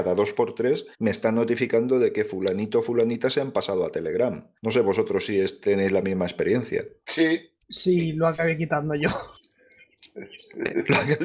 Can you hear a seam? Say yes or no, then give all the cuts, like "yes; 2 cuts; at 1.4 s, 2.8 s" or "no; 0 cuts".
yes; 3 cuts; at 0.9 s, 4.6 s, 7.6 s